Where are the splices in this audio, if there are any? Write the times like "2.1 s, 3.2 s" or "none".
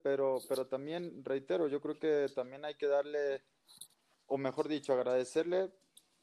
none